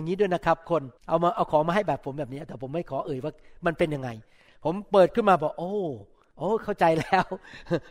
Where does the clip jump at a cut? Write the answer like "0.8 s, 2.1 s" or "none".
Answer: 1.0 s